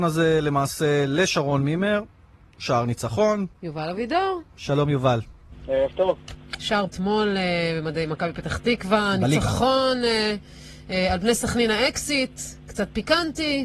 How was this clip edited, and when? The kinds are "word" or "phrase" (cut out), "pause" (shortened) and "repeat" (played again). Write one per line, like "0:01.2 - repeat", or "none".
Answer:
0:06.9 - word